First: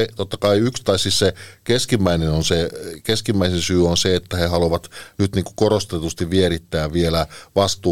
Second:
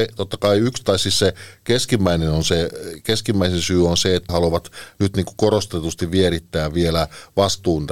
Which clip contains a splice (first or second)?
second